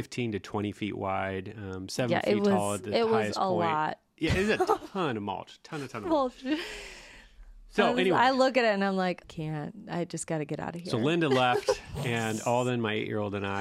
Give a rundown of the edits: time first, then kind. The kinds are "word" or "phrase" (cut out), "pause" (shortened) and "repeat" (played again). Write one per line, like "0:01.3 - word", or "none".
0:09.2 - phrase